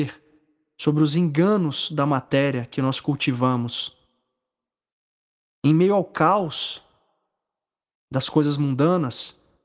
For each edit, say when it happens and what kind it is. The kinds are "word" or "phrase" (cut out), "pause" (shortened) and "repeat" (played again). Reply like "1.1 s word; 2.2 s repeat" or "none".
none